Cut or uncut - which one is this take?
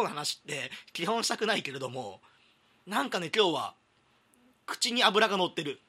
uncut